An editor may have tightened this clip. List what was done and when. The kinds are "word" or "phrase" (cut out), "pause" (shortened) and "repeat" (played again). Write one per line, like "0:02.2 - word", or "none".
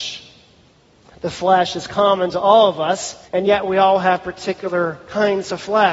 0:03.3 - pause